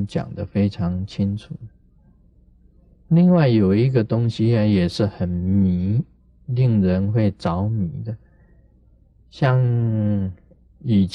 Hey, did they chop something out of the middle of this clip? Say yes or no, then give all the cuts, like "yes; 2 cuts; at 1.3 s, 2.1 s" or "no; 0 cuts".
no; 0 cuts